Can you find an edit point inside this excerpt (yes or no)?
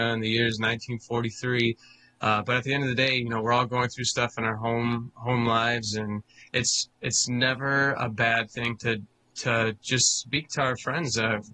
no